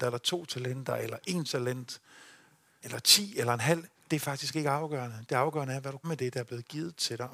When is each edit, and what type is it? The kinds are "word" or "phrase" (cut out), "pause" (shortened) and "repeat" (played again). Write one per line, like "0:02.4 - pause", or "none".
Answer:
0:02.8 - word
0:06.0 - word